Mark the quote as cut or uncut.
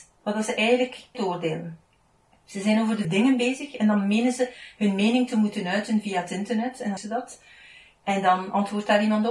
cut